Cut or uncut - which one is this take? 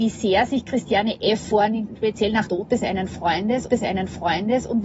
cut